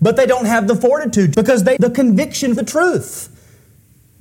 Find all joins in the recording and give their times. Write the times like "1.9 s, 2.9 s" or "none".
1.3 s, 1.8 s, 2.6 s